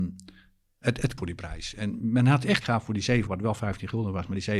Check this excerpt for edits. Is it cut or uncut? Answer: cut